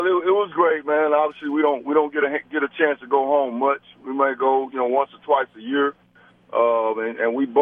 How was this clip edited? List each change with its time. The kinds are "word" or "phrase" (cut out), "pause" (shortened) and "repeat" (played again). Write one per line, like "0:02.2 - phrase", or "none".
none